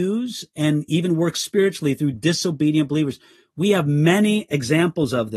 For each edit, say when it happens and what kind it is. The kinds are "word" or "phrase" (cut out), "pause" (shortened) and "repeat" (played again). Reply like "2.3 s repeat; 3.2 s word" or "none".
none